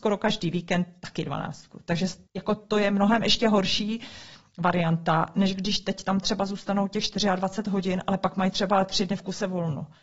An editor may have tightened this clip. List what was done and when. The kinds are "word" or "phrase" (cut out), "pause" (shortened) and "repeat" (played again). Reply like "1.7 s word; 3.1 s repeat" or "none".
2.3 s pause